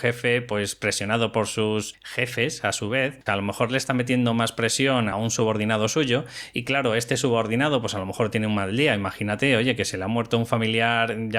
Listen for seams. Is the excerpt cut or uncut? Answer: cut